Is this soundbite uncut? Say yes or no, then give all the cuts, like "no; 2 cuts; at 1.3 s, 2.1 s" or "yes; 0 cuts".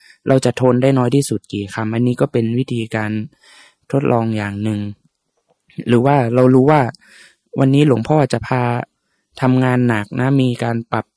yes; 0 cuts